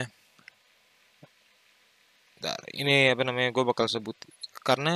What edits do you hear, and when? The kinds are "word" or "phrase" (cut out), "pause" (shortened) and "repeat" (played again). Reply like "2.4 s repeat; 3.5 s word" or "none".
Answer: none